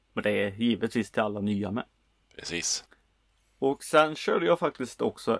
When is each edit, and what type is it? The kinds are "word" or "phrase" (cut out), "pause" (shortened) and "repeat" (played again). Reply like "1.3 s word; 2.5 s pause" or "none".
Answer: none